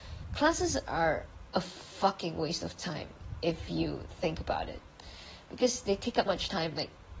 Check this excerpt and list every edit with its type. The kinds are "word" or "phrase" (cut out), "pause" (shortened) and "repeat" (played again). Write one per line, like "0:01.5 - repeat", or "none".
0:06.3 - word